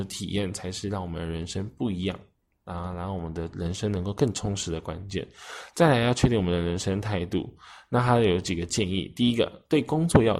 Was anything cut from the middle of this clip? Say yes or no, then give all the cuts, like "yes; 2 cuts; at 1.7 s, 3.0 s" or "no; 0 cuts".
no; 0 cuts